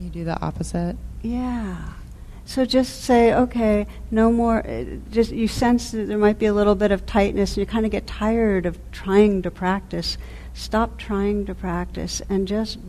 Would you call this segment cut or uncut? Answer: uncut